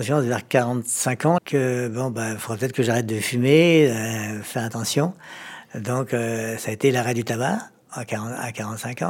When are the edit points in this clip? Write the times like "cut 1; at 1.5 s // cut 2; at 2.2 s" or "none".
cut 1; at 1.4 s

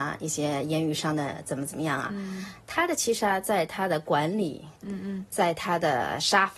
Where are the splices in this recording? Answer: cut 1; at 4.8 s

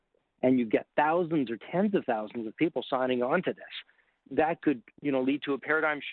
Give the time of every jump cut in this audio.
cut 1; at 4.9 s

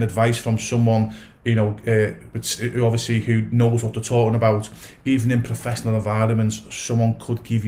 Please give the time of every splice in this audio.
none

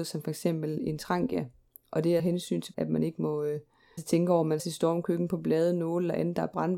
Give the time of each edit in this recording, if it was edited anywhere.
cut 1; at 2.2 s // cut 2; at 2.7 s // cut 3; at 4.0 s // cut 4; at 4.6 s

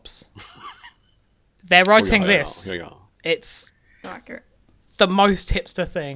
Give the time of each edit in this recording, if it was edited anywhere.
cut 1; at 4.0 s

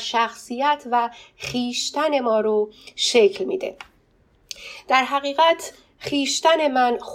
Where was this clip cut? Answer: none

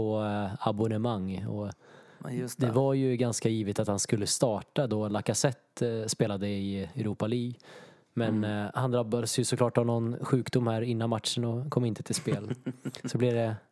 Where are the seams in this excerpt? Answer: none

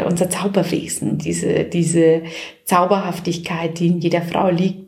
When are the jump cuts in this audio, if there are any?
none

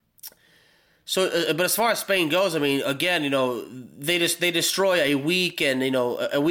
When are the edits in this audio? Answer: none

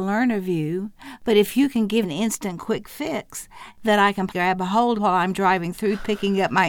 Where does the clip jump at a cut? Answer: cut 1; at 2.0 s // cut 2; at 4.3 s // cut 3; at 4.9 s

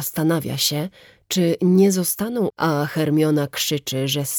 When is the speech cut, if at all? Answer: cut 1; at 2.5 s

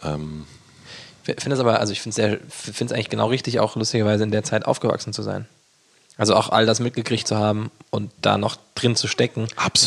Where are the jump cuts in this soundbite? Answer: none

